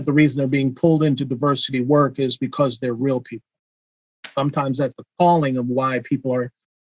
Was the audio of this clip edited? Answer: no; 0 cuts

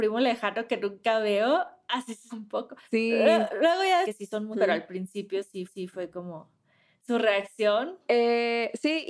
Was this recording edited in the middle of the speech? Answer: yes; 5 cuts; at 2.3 s, 2.8 s, 4.0 s, 4.5 s, 5.7 s

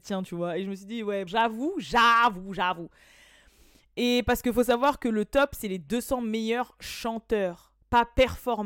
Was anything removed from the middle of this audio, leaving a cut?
yes; 1 cut; at 1.3 s

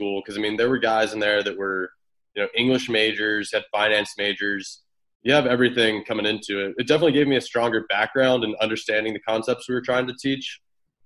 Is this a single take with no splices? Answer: yes; 0 cuts

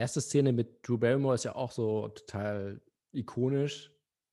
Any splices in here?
no; 0 cuts

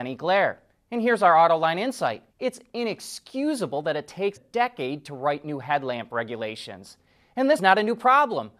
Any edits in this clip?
yes; 3 cuts; at 2.3 s, 4.4 s, 7.6 s

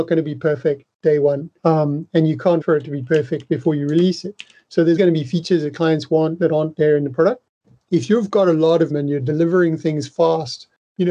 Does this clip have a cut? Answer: yes; 4 cuts; at 1.6 s, 2.6 s, 5.0 s, 8.9 s

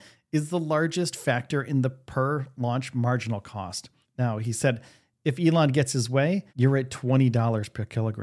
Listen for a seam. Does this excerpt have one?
yes; 2 cuts; at 4.0 s, 6.5 s

